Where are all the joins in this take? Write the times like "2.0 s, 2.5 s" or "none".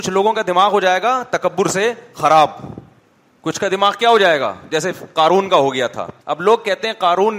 3.0 s, 6.2 s